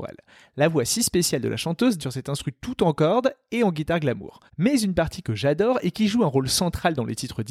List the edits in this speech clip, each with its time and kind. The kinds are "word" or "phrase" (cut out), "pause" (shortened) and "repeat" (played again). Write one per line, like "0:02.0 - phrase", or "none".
0:02.0 - word
0:04.5 - pause

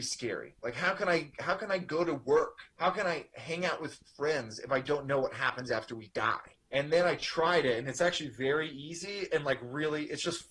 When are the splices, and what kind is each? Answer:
0:02.7 - pause
0:06.6 - pause

